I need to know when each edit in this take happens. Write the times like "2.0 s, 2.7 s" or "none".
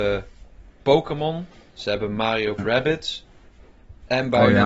2.6 s